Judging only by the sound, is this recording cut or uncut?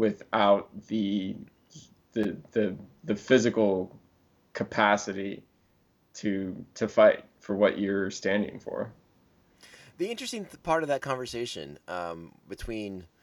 uncut